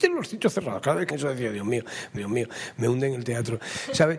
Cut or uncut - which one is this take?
cut